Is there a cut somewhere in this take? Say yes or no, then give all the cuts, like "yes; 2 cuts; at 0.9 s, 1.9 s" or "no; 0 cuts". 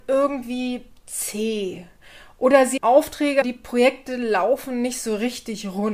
yes; 2 cuts; at 2.8 s, 3.4 s